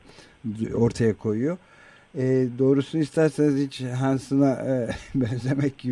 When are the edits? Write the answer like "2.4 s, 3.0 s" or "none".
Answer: none